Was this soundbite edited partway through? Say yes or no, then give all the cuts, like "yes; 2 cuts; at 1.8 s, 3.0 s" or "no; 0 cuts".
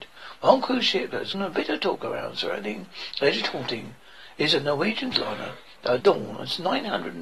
yes; 3 cuts; at 1.3 s, 5.1 s, 6.0 s